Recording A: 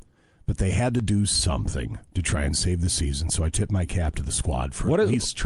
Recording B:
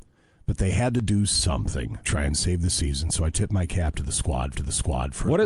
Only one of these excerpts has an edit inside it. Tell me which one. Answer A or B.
B